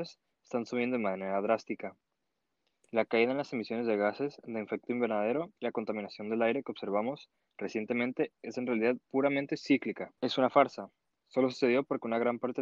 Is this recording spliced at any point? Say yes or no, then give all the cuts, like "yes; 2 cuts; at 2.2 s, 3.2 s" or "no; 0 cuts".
yes; 2 cuts; at 5.6 s, 10.2 s